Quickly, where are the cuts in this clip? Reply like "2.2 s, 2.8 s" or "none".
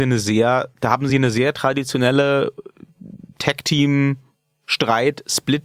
none